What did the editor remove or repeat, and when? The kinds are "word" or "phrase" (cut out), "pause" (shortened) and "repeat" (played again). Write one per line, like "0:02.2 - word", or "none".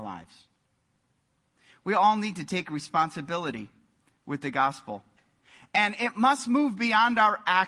none